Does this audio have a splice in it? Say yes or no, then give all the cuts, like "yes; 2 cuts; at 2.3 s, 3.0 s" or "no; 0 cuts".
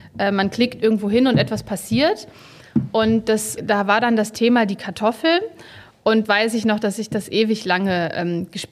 yes; 2 cuts; at 3.6 s, 6.2 s